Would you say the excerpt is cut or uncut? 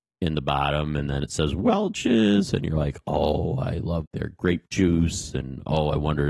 cut